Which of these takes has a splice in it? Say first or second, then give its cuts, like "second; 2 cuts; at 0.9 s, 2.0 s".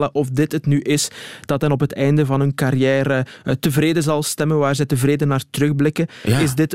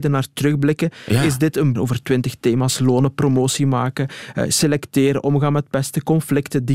second; 1 cut; at 1.8 s